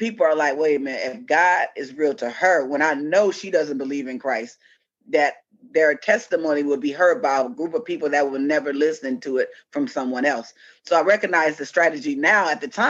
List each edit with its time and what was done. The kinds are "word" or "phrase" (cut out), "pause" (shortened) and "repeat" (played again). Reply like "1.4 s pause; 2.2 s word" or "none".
none